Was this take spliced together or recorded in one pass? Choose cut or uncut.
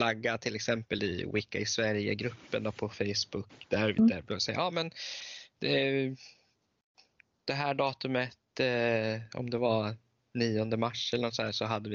uncut